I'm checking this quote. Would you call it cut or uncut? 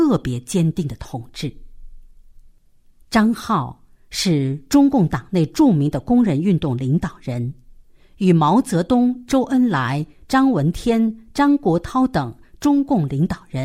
uncut